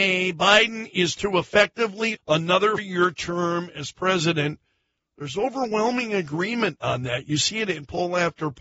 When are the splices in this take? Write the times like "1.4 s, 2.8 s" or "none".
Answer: 1.2 s, 2.1 s, 2.8 s